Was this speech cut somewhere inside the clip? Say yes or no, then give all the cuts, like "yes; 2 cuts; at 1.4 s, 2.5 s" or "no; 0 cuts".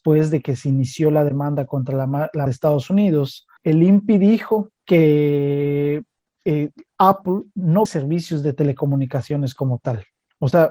yes; 4 cuts; at 2.5 s, 3.6 s, 4.8 s, 7.9 s